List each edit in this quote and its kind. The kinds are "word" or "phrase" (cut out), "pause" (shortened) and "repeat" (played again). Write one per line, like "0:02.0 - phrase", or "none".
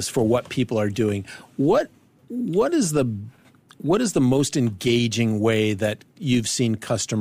none